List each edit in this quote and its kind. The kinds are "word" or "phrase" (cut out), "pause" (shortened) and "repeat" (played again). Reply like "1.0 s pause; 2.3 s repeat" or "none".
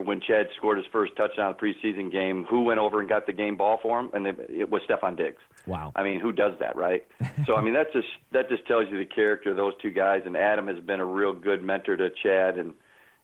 none